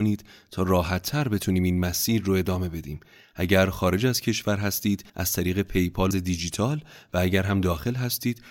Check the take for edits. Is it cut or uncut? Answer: cut